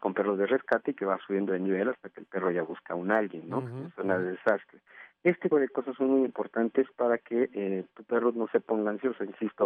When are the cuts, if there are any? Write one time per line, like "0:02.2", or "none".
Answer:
0:05.5